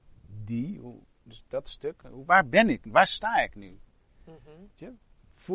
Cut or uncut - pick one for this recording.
uncut